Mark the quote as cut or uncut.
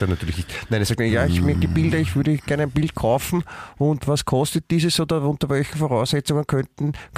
cut